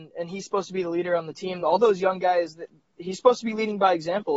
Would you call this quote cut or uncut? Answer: uncut